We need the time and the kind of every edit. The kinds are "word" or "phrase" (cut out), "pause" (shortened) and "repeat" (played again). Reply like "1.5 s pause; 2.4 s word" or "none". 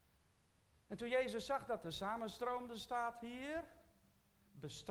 1.8 s word